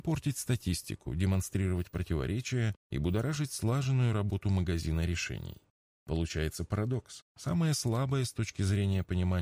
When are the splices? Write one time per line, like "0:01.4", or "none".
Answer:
none